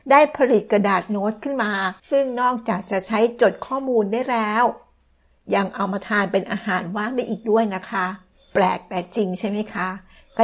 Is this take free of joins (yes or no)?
no